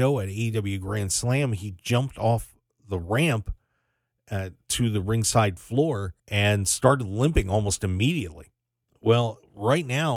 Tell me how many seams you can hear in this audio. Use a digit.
1